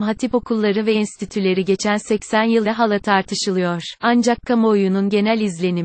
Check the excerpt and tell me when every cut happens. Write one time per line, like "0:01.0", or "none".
0:00.9
0:02.6
0:04.0